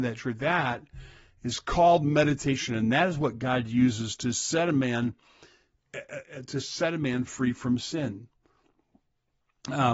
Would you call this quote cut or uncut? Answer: uncut